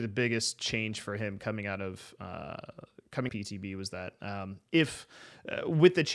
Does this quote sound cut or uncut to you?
cut